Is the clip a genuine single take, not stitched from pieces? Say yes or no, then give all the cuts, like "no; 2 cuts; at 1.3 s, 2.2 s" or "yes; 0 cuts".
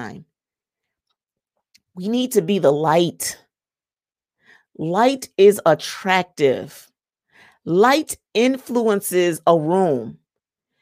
yes; 0 cuts